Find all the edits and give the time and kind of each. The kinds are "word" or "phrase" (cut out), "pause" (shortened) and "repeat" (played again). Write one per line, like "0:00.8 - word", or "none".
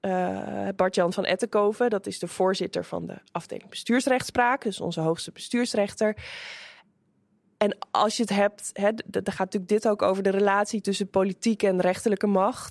none